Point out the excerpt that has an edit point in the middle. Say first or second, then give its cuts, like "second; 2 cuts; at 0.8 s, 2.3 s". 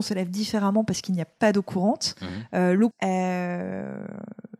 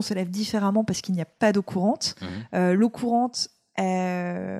first; 1 cut; at 2.9 s